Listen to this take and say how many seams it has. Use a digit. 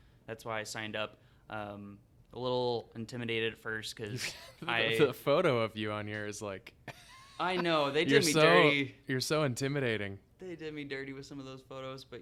0